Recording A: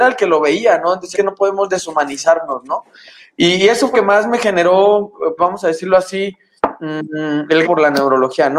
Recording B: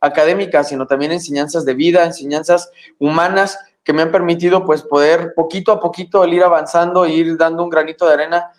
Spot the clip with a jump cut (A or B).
A